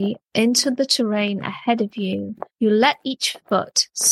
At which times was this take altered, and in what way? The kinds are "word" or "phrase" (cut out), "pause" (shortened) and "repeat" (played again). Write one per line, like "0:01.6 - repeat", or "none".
0:02.5 - pause